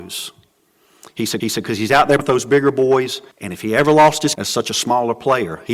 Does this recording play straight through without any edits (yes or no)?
no